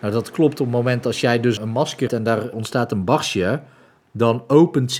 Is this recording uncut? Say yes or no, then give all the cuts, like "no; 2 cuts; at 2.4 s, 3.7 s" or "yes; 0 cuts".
no; 3 cuts; at 1.6 s, 2.1 s, 2.5 s